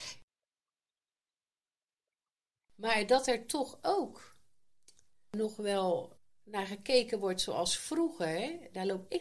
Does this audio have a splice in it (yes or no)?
no